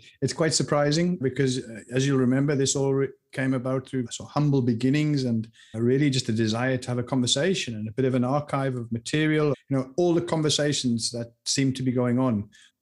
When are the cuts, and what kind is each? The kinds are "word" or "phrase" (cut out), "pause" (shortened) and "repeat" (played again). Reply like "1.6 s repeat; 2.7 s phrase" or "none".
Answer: 1.2 s word; 4.1 s word; 5.7 s word; 9.5 s word